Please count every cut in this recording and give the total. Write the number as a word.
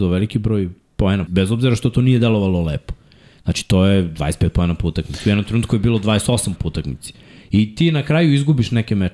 two